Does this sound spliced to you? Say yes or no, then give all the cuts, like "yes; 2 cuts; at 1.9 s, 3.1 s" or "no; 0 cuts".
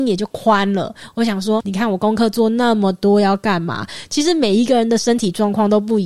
yes; 1 cut; at 1.6 s